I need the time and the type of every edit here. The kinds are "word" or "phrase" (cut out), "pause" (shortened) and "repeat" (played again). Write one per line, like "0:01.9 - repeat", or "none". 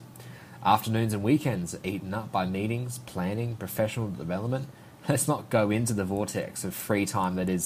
none